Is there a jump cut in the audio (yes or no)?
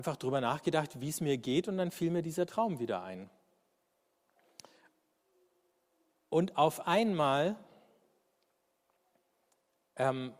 no